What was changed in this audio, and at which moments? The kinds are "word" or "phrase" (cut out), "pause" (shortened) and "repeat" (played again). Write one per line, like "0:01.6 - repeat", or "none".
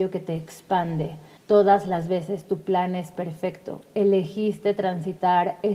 0:01.4 - pause